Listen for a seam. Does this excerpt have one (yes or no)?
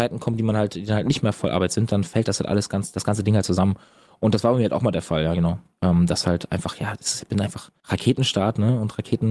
no